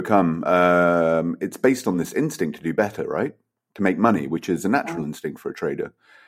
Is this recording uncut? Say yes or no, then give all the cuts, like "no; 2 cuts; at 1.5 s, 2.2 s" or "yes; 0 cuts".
yes; 0 cuts